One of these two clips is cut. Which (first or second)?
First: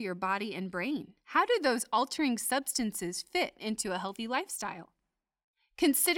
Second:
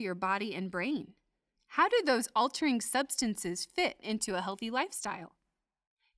first